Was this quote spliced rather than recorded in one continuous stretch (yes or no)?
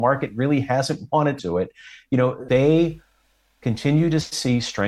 yes